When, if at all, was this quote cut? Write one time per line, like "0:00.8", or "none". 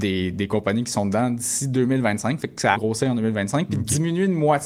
0:02.7